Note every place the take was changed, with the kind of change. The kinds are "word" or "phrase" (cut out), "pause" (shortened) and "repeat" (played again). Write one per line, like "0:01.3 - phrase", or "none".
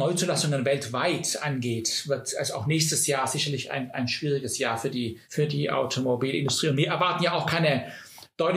0:05.2 - pause